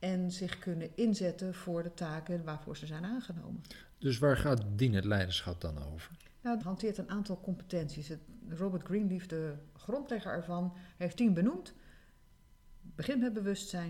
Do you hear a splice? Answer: yes; 2 cuts; at 6.6 s, 11.1 s

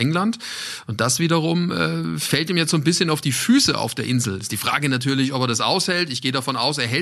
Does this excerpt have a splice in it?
no; 0 cuts

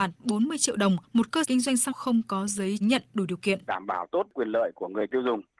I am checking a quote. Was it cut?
yes; 4 cuts; at 1.4 s, 1.9 s, 2.8 s, 3.7 s

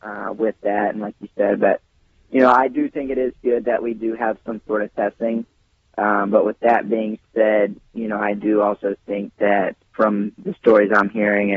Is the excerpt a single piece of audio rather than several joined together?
yes; 0 cuts

